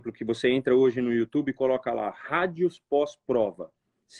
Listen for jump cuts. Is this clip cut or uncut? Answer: uncut